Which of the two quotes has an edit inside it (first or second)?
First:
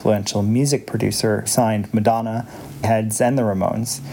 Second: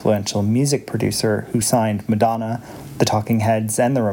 first